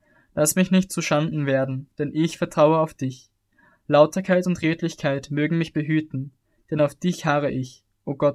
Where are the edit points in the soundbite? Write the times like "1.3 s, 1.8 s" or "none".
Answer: none